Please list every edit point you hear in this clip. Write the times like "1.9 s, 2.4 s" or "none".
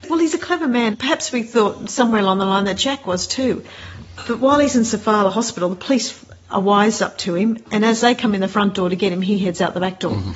0.9 s, 6.5 s